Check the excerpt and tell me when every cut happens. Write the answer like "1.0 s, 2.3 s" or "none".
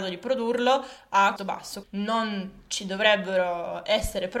1.4 s, 1.8 s